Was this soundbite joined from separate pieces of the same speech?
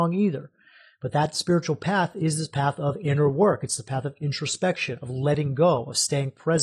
no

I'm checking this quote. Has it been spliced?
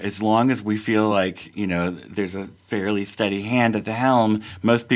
no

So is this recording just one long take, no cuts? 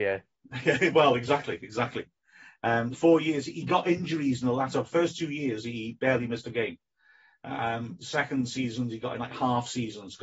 no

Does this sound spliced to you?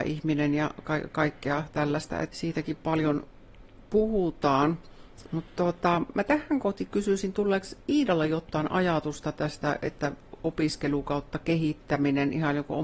yes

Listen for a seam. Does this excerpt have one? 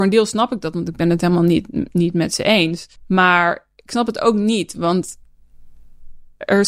yes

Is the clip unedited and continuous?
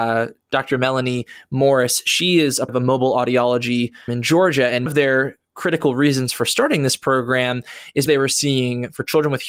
no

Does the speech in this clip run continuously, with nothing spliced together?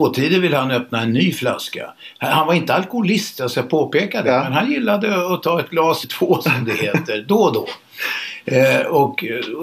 no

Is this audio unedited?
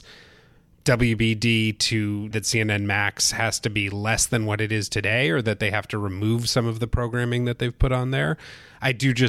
no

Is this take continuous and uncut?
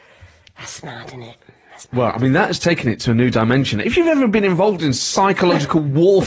yes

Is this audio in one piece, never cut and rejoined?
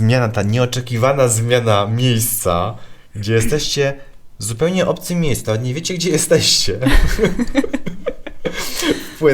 yes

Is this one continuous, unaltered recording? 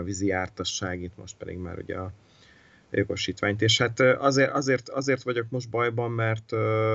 yes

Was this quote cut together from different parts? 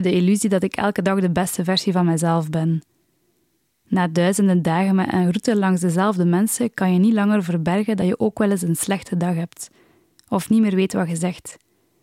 no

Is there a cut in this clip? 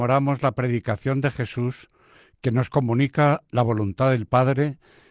no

